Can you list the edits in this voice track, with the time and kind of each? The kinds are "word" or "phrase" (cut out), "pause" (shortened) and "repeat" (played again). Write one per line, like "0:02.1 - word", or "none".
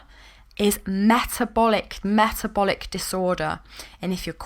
0:02.0 - word

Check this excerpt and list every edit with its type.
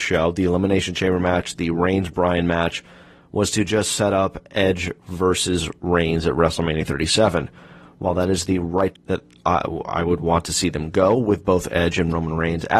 0:08.9 - word

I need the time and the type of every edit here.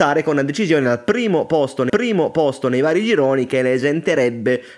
0:01.9 - repeat

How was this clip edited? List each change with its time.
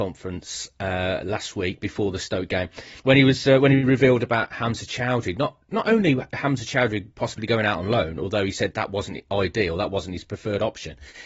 0:03.0 - pause

